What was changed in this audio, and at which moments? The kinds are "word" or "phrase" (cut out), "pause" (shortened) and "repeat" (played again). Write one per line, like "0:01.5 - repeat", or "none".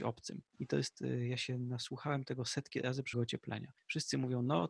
0:03.1 - phrase